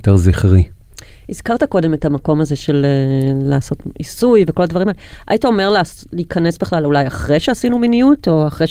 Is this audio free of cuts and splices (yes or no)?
yes